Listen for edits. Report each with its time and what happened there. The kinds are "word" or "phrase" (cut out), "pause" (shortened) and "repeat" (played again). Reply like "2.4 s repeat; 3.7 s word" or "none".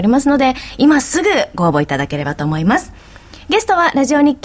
none